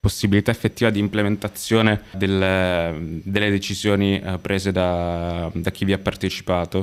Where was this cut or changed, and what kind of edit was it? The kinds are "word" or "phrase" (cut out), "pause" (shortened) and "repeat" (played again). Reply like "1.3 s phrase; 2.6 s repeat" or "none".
2.1 s word

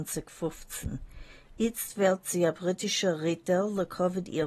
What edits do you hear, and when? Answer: none

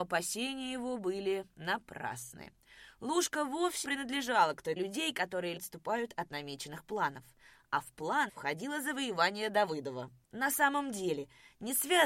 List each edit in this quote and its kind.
3.8 s word; 4.8 s word; 5.6 s word; 8.3 s word

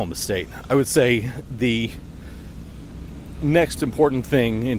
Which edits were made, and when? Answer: 3.8 s word

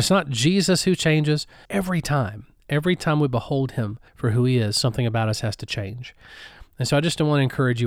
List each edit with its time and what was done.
1.6 s phrase; 4.1 s pause

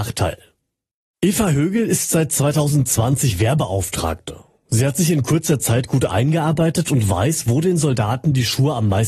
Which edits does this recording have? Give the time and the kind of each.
none

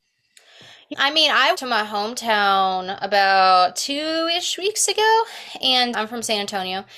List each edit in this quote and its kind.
0.9 s word; 1.5 s phrase; 5.9 s word

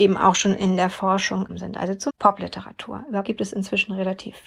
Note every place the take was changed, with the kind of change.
1.5 s word; 2.1 s word; 3.2 s word

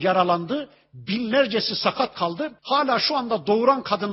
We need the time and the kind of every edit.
2.6 s pause

